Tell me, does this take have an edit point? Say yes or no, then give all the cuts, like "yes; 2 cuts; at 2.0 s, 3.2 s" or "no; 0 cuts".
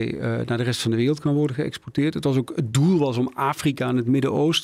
no; 0 cuts